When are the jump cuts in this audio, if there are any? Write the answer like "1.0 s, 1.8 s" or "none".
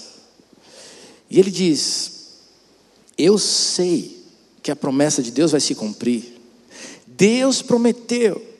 none